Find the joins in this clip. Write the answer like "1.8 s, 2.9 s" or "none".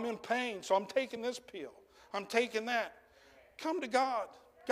none